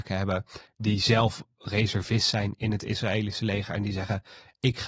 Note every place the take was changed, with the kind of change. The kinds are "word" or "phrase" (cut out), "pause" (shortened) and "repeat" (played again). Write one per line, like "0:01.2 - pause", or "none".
none